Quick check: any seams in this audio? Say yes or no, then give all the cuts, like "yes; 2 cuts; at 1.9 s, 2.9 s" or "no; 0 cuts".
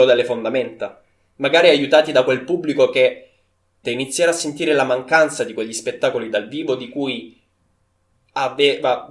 yes; 1 cut; at 3.8 s